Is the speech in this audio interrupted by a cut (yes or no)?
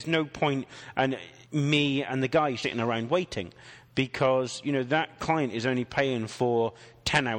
yes